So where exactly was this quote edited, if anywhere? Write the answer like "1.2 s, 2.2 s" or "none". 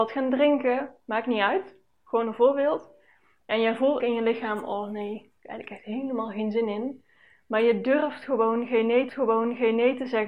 4.0 s, 5.4 s, 9.1 s